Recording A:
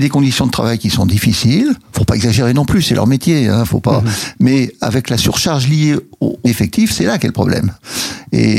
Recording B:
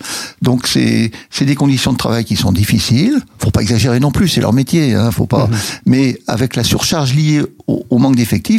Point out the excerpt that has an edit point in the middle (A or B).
A